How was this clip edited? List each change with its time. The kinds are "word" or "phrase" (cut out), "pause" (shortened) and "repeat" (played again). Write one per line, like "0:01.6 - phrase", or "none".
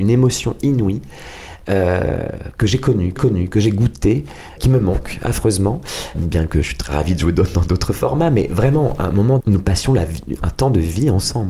0:03.2 - repeat
0:04.6 - word
0:06.1 - word
0:09.4 - word